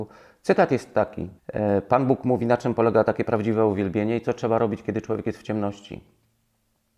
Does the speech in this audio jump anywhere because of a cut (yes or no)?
yes